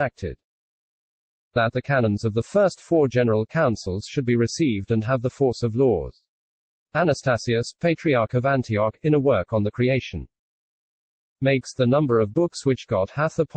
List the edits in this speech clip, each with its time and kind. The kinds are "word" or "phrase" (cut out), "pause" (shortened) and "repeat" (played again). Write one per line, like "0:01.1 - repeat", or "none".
none